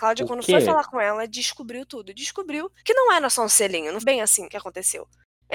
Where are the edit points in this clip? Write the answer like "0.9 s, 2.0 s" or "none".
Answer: 2.8 s, 4.0 s